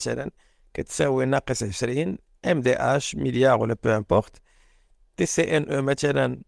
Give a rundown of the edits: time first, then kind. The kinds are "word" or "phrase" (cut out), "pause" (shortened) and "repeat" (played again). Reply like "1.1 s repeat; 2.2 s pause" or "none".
none

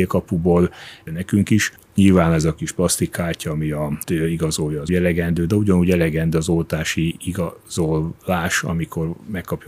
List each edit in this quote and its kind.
1.1 s phrase; 1.8 s pause; 4.0 s word; 4.9 s word

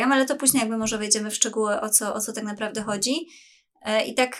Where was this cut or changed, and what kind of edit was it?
none

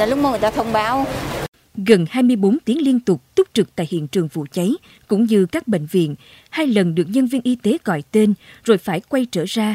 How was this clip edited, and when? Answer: none

